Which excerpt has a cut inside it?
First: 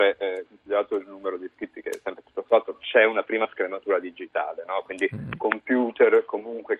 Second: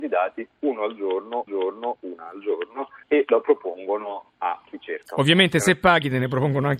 second; 3 cuts; at 1.5 s, 3.0 s, 4.3 s

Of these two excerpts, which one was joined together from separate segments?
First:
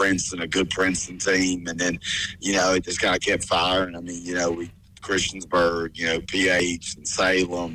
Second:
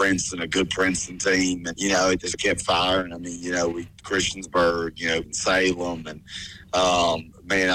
second; 4 cuts; at 1.7 s, 2.3 s, 3.9 s, 5.2 s

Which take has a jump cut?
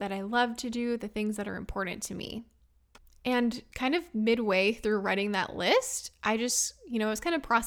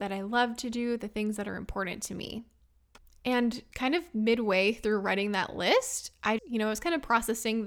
second; 1 cut; at 6.4 s

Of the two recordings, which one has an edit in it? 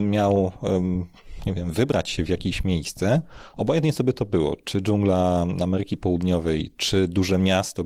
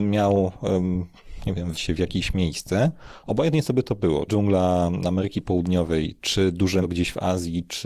second; 3 cuts; at 1.7 s, 4.3 s, 6.8 s

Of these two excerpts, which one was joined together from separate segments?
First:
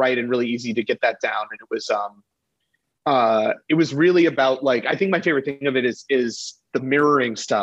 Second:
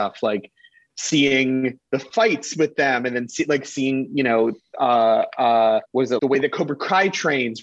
second; 3 cuts; at 1.8 s, 5.9 s, 6.2 s

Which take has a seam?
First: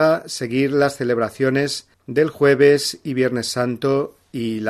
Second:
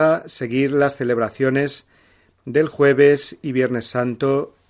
first; 1 cut; at 1.9 s

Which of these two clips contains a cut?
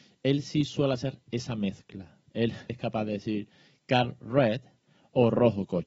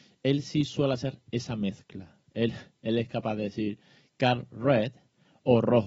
first; 1 cut; at 2.7 s

